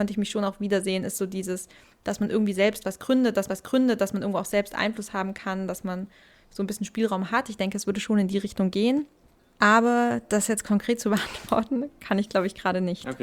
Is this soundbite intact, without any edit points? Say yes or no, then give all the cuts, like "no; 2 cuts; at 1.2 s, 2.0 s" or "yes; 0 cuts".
no; 1 cut; at 3.5 s